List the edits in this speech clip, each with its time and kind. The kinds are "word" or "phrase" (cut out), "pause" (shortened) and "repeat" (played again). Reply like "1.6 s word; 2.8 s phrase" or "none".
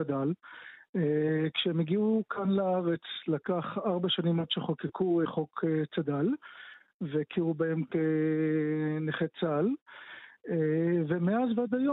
5.2 s word